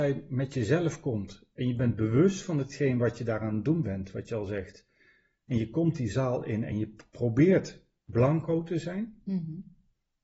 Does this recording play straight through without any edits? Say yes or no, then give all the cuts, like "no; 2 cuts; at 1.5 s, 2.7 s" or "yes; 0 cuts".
yes; 0 cuts